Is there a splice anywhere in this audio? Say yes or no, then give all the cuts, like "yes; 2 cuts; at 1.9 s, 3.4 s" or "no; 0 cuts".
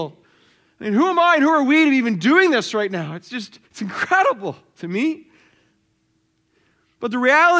yes; 1 cut; at 3.7 s